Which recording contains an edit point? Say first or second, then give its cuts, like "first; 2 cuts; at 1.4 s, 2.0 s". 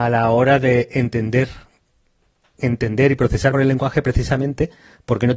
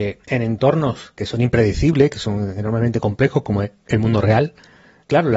first; 1 cut; at 3.5 s